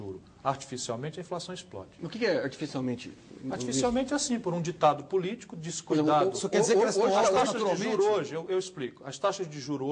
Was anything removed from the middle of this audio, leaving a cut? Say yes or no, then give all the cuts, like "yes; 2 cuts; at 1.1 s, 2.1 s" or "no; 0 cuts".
no; 0 cuts